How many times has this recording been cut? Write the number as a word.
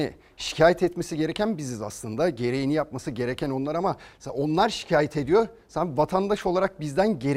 zero